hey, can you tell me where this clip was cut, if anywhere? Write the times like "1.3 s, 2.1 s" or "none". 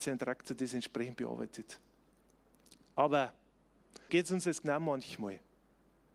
4.1 s, 4.6 s

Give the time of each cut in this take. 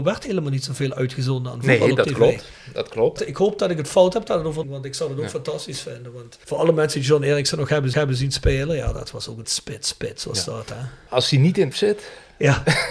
4.6 s, 6.4 s, 7.9 s, 9.4 s, 11.7 s

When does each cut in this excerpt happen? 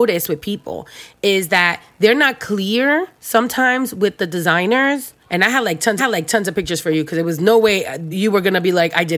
5.2 s, 6.0 s, 8.1 s

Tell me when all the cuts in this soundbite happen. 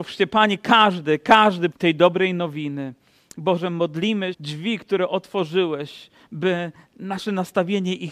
1.7 s, 4.3 s

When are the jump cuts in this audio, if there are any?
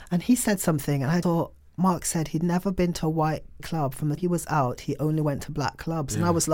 1.2 s, 3.6 s, 4.2 s

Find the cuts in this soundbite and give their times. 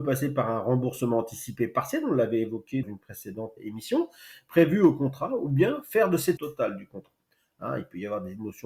2.8 s, 3.6 s, 6.4 s

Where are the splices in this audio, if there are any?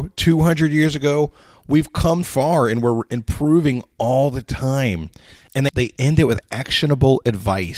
2.2 s

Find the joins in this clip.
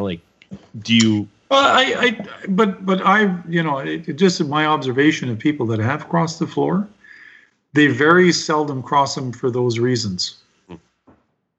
none

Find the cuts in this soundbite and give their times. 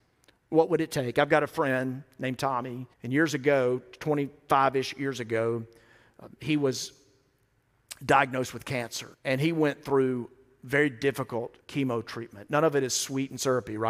2.9 s, 9.1 s, 11.6 s

